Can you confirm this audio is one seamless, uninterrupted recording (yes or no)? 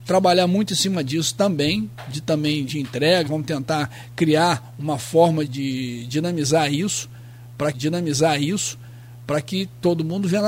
no